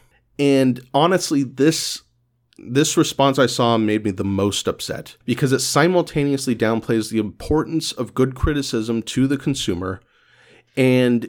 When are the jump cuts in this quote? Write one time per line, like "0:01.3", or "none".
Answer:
0:05.2